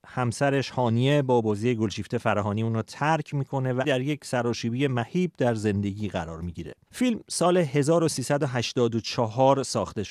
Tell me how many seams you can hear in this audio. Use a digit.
1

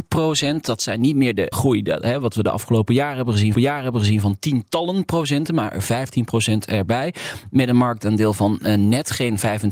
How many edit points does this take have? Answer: 2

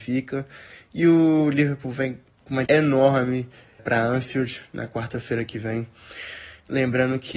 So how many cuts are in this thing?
2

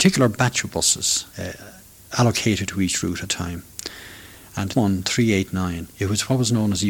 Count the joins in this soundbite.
4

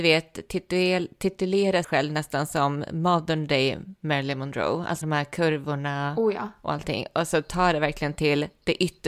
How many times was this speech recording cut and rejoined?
2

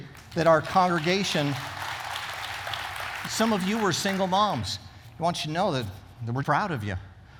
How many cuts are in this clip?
2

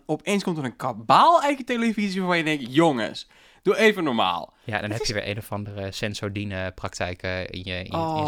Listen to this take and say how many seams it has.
0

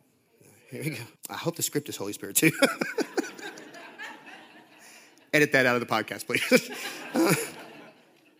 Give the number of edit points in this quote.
1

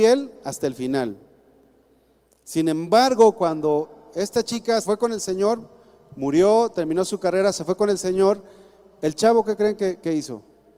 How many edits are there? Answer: 1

